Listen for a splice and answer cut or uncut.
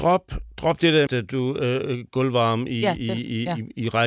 cut